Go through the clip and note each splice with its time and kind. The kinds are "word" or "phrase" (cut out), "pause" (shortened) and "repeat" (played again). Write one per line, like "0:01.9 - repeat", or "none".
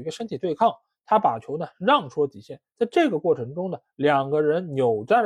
none